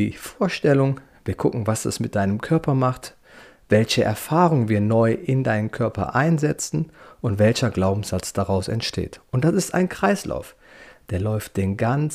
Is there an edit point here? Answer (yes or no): no